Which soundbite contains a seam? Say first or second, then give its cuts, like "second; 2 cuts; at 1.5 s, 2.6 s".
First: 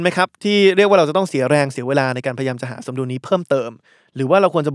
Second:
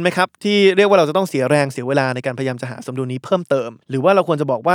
second; 1 cut; at 3.8 s